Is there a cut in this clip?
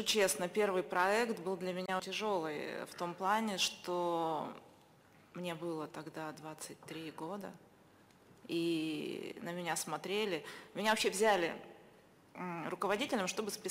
yes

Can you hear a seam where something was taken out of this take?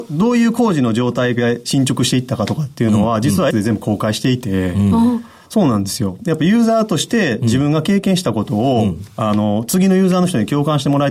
yes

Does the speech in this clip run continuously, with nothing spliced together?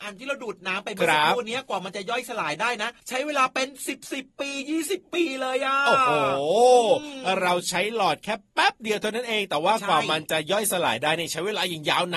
no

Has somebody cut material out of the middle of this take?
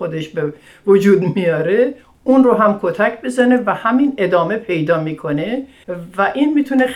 no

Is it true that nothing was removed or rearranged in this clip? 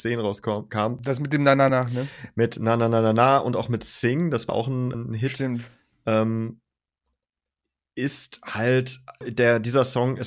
no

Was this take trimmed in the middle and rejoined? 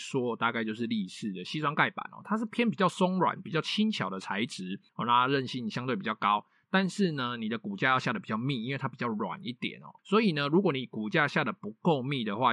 yes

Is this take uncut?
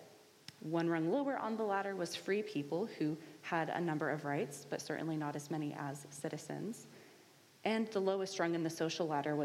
yes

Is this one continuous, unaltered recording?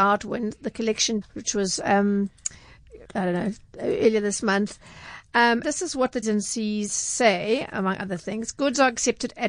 no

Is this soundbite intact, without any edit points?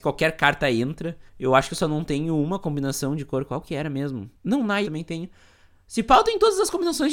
no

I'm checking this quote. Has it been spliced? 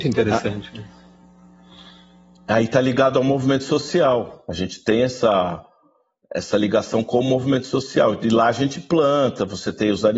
no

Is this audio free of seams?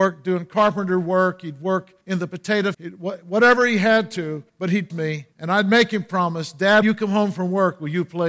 no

